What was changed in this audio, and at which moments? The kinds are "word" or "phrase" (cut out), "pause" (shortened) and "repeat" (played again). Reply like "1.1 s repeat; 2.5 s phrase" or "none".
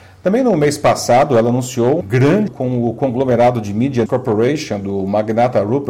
2.0 s word; 2.5 s word; 4.1 s word